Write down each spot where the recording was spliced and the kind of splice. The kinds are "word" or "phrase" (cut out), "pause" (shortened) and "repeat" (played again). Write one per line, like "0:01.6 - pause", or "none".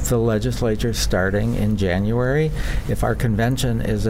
none